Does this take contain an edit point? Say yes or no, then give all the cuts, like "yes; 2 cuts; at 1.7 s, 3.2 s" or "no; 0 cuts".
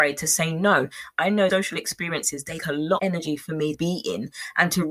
yes; 4 cuts; at 1.5 s, 2.6 s, 3.0 s, 3.7 s